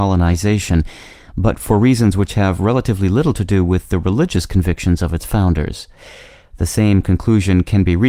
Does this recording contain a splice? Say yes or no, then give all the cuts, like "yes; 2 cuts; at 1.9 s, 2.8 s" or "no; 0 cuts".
no; 0 cuts